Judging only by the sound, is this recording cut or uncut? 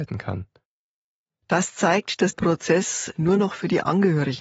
cut